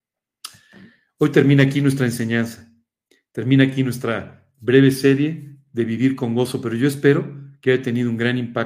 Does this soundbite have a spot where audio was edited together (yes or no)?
no